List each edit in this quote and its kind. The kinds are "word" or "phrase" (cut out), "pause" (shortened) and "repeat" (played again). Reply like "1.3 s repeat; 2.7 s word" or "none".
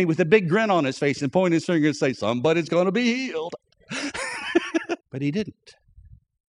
5.0 s pause